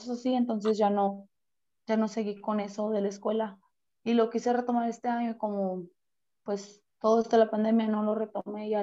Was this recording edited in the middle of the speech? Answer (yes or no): no